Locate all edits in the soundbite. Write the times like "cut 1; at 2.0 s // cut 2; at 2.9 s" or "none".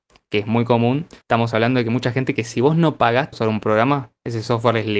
cut 1; at 1.2 s // cut 2; at 2.4 s // cut 3; at 3.3 s